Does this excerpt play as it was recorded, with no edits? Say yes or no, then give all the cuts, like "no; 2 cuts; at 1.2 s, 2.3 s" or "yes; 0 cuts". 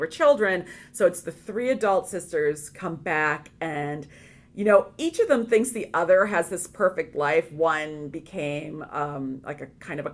yes; 0 cuts